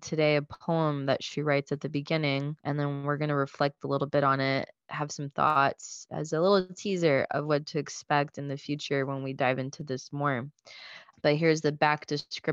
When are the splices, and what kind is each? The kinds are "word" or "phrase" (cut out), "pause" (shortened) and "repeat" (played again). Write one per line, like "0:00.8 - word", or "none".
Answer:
0:02.6 - pause